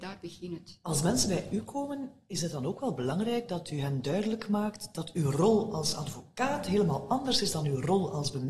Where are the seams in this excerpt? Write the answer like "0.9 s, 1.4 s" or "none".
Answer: none